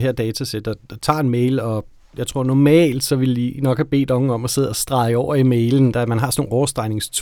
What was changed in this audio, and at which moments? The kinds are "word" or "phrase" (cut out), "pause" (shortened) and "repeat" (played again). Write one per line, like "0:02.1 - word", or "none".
none